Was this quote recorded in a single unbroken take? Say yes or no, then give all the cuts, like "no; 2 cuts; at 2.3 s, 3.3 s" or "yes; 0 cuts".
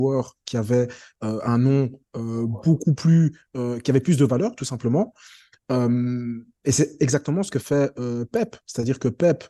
yes; 0 cuts